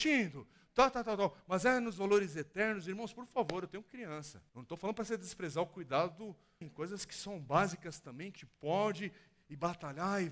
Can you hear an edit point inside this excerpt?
yes; 3 cuts; at 4.5 s, 6.6 s, 8.4 s

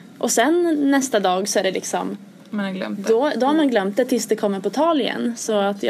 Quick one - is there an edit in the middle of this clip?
no; 0 cuts

